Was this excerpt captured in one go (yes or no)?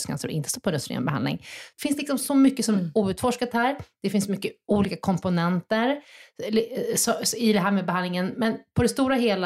yes